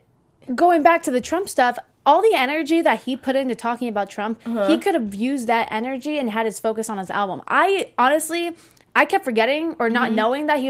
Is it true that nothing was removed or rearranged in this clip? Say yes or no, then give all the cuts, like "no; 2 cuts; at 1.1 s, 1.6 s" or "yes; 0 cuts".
yes; 0 cuts